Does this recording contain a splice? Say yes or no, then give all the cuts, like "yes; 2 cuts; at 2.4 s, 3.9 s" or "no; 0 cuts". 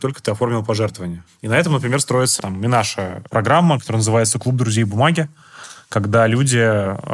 yes; 1 cut; at 2.4 s